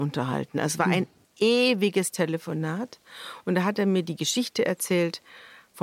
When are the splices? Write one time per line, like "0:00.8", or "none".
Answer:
none